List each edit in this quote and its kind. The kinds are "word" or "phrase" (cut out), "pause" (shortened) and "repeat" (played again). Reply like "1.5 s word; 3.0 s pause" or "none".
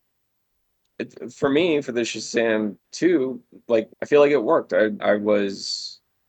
2.8 s pause; 3.9 s pause; 5.0 s word